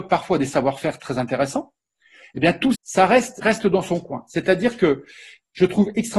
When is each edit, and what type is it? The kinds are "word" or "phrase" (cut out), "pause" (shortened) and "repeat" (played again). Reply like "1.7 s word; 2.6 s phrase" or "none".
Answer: 2.7 s word; 3.4 s word